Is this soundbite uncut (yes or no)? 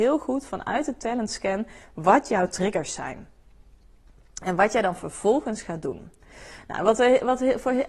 yes